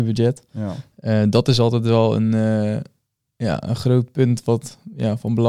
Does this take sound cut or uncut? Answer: uncut